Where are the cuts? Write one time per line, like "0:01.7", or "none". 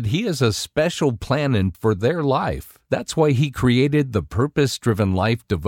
0:01.7